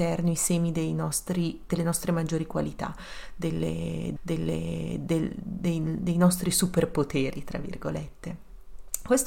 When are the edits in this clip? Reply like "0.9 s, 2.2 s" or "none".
4.2 s